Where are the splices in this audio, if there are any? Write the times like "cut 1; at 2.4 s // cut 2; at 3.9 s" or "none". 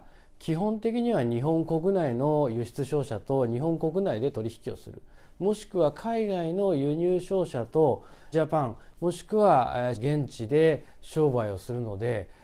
cut 1; at 8.3 s // cut 2; at 9.9 s